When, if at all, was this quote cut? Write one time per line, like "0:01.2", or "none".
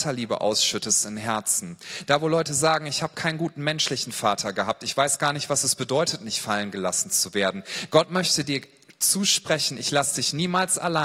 none